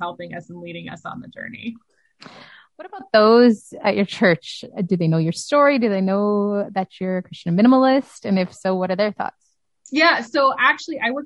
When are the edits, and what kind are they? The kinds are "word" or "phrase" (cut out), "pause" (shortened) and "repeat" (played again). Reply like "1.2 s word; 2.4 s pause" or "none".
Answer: none